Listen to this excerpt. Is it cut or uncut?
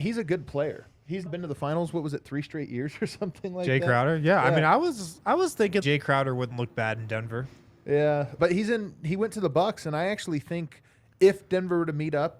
cut